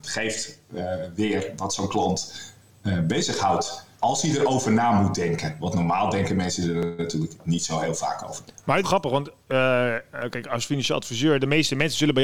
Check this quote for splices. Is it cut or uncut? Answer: cut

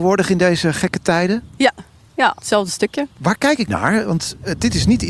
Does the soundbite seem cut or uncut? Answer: cut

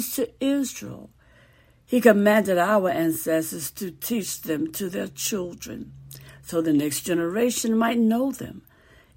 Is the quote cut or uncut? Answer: uncut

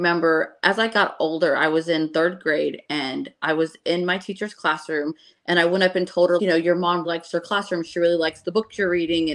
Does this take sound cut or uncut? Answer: cut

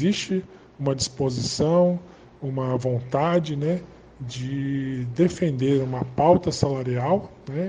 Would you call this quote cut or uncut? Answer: uncut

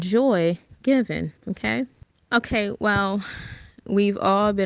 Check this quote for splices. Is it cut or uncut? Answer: cut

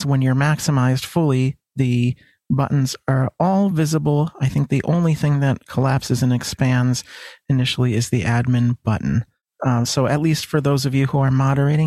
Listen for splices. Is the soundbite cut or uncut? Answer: uncut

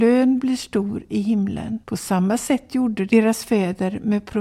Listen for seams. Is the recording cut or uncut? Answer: cut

